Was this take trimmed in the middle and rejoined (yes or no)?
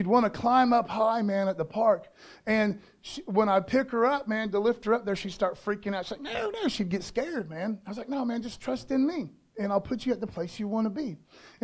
no